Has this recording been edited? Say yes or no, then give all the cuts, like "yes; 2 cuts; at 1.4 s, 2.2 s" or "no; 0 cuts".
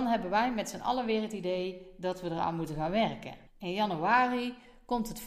yes; 1 cut; at 3.5 s